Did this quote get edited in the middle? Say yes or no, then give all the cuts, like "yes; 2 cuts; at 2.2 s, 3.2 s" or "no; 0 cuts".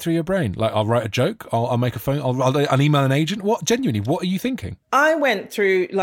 yes; 1 cut; at 4.8 s